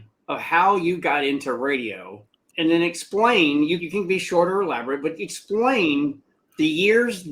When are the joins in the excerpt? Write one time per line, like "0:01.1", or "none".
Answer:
0:02.5
0:03.8